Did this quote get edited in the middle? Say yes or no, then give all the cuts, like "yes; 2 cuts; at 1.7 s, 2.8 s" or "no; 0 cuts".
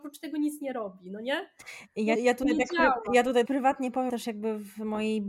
yes; 3 cuts; at 2.2 s, 3.5 s, 4.1 s